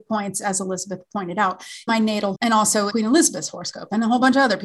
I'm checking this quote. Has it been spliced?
yes; 3 cuts; at 1.9 s, 2.3 s, 2.9 s

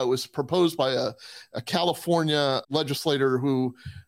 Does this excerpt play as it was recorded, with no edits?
no; 1 cut; at 2.6 s

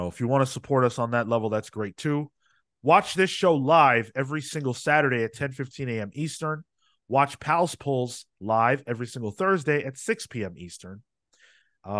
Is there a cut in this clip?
no; 0 cuts

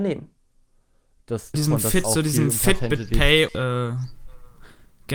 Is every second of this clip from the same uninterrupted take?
no; 3 cuts; at 1.5 s, 2.0 s, 3.5 s

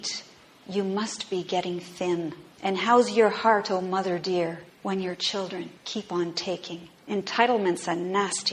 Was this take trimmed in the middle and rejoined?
yes; 4 cuts; at 2.5 s, 4.7 s, 5.8 s, 7.0 s

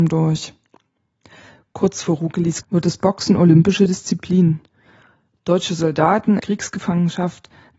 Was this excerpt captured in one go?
no; 2 cuts; at 2.6 s, 6.4 s

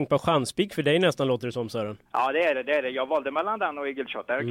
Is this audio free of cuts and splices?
no; 1 cut; at 2.0 s

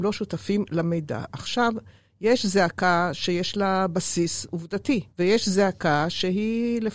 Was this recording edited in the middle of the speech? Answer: yes; 1 cut; at 5.1 s

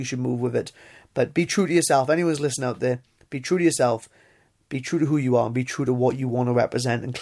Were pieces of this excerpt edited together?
no; 0 cuts

